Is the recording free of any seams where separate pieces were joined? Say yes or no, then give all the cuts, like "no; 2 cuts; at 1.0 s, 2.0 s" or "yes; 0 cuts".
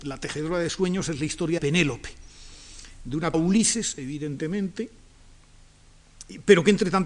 no; 2 cuts; at 1.6 s, 3.3 s